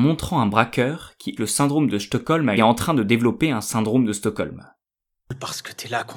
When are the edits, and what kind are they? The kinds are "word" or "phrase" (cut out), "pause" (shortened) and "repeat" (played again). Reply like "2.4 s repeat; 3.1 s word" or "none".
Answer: 1.4 s word; 2.6 s phrase